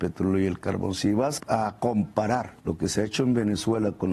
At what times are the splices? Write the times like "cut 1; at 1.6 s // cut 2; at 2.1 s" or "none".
cut 1; at 1.4 s // cut 2; at 2.6 s